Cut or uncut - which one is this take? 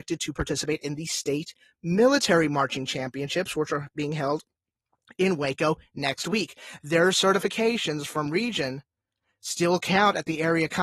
uncut